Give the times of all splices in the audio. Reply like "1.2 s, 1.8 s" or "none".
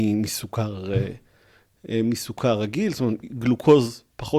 none